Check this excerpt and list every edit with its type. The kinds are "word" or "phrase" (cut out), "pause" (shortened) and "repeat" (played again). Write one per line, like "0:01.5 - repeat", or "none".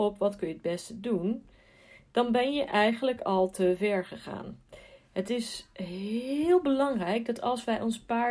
none